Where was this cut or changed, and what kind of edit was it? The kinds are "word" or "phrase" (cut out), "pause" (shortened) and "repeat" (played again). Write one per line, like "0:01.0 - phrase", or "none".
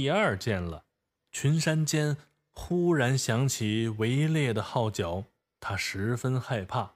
0:05.4 - pause

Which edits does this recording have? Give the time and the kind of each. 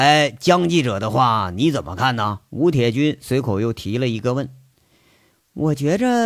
0:02.5 - pause

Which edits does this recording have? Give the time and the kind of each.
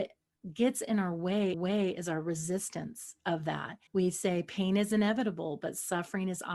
0:01.5 - repeat
0:03.9 - pause

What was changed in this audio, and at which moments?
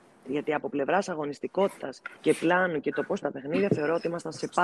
0:02.2 - pause
0:03.2 - word

